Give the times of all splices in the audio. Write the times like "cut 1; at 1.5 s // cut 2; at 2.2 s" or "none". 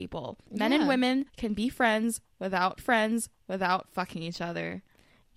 cut 1; at 1.3 s // cut 2; at 2.8 s

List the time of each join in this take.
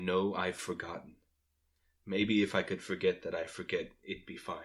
none

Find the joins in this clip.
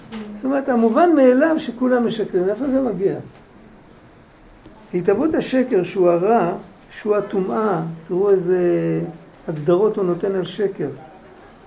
none

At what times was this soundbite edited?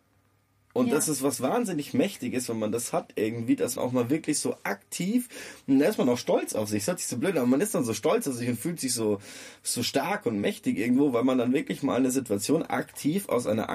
cut 1; at 3.8 s

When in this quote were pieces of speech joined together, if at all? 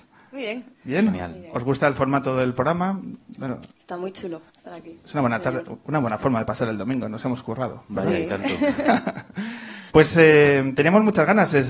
cut 1; at 3.7 s // cut 2; at 4.5 s // cut 3; at 9.9 s

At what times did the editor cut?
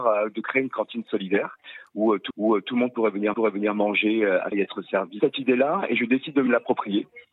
cut 1; at 2.3 s // cut 2; at 3.3 s // cut 3; at 4.5 s // cut 4; at 5.2 s

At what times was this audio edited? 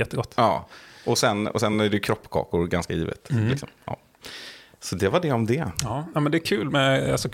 none

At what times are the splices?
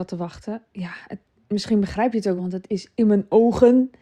cut 1; at 1.3 s // cut 2; at 2.4 s

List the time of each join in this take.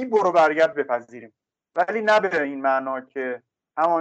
none

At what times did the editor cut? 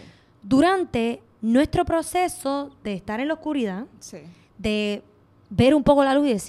none

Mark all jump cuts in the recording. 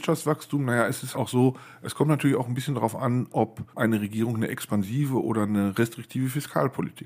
cut 1; at 1.1 s // cut 2; at 3.7 s

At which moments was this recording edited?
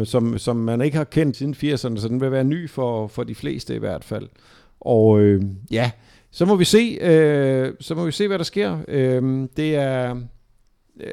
cut 1; at 1.3 s

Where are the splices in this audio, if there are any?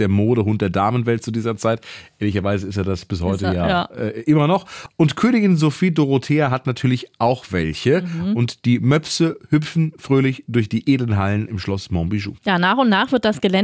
cut 1; at 12.4 s

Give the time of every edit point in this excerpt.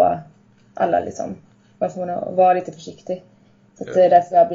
none

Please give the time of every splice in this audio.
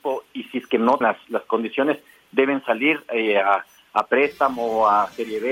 cut 1; at 1.0 s

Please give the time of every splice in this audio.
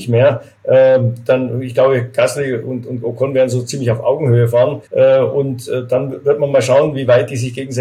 cut 1; at 4.9 s

